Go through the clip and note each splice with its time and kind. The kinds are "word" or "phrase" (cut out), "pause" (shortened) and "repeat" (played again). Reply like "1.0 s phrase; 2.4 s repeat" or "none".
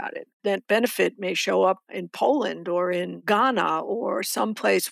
none

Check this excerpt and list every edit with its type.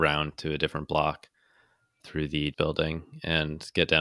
2.0 s word; 2.5 s word

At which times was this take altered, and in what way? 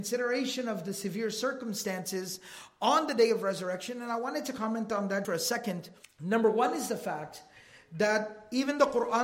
5.2 s word; 6.0 s pause

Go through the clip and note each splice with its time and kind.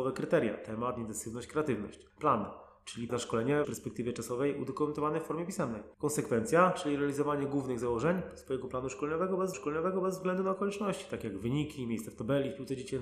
2.1 s pause; 3.1 s word; 3.6 s phrase; 5.9 s pause; 9.5 s repeat

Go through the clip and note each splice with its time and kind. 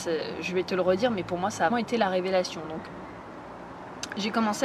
1.7 s word

